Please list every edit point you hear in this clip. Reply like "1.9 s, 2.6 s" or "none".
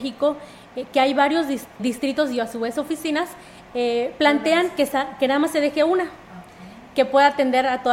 1.8 s